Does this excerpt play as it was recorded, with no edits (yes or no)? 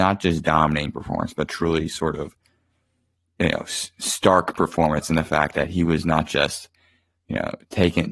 yes